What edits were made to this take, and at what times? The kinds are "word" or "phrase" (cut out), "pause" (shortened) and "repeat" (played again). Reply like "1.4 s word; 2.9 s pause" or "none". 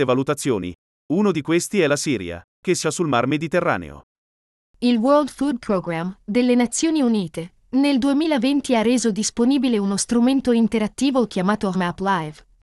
2.8 s word; 11.7 s word